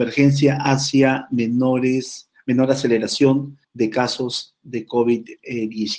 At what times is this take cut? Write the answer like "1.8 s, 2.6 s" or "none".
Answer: 3.6 s